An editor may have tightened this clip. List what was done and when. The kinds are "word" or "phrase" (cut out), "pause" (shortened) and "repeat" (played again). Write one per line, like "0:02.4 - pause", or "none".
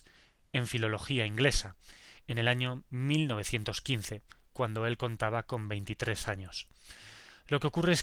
none